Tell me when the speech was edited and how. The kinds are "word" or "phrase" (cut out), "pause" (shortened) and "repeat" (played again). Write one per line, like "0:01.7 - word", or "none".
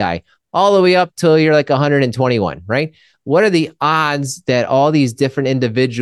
none